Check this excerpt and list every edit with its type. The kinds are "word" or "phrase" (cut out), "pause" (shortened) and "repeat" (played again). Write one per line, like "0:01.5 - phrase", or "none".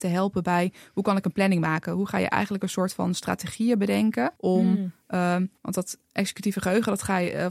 0:04.4 - pause
0:05.6 - pause